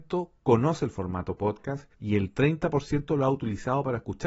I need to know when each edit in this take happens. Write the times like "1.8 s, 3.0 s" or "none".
1.9 s